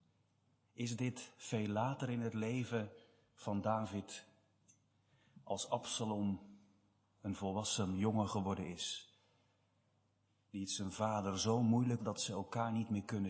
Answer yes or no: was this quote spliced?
yes